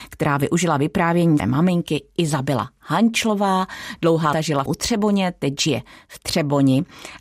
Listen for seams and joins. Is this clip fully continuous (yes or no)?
no